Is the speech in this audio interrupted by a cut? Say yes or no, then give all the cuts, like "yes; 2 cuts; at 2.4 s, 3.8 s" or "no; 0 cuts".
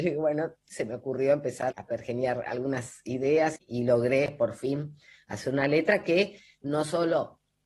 yes; 2 cuts; at 1.7 s, 3.6 s